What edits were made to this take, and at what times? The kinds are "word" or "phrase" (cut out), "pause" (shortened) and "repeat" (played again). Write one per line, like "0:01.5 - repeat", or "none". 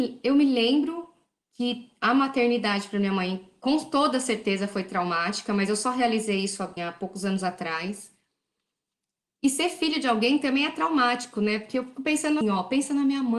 0:06.8 - word
0:12.4 - word